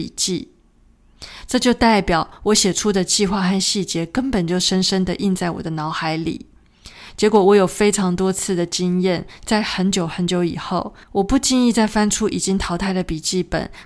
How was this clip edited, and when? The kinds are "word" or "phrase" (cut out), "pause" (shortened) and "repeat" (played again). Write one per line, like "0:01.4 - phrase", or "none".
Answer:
0:11.0 - pause